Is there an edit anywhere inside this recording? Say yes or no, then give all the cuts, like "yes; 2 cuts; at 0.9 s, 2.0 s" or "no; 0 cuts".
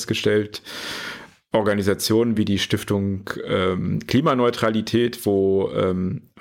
no; 0 cuts